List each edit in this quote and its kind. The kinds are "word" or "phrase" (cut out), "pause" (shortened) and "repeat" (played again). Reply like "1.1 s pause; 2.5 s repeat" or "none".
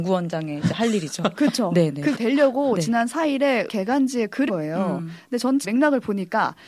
2.1 s word; 3.7 s word; 4.5 s word; 5.6 s word